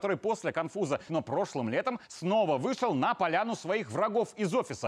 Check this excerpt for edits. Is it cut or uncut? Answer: cut